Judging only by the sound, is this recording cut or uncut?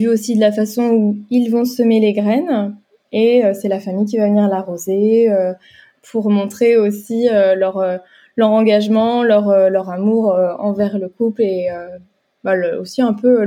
uncut